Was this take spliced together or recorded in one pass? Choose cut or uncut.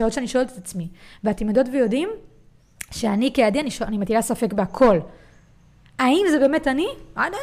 uncut